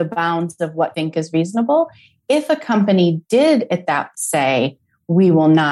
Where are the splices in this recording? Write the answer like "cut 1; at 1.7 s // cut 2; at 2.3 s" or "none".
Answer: cut 1; at 0.9 s // cut 2; at 4.1 s